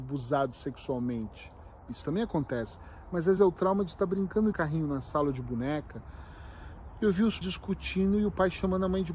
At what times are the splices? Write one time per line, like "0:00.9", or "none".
0:03.4
0:04.5
0:07.4

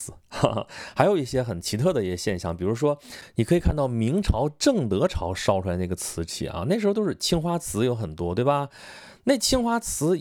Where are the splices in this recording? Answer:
none

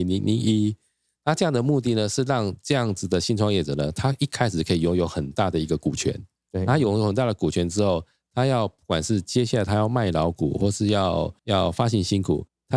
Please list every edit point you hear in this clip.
0:11.4

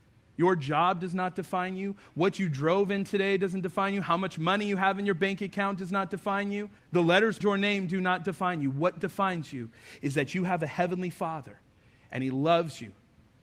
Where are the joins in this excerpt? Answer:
0:06.8
0:07.4

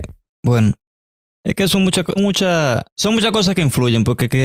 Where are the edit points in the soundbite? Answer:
0:02.2
0:02.9

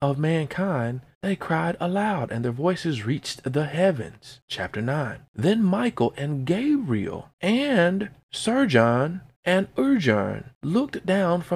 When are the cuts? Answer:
none

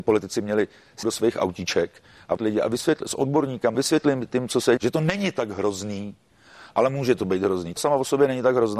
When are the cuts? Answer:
0:01.0
0:02.4
0:03.7
0:04.8
0:07.8

